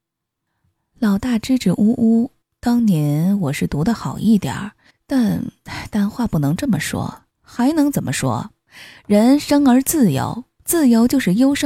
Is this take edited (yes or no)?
yes